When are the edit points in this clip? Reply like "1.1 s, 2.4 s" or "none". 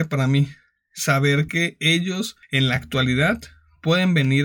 none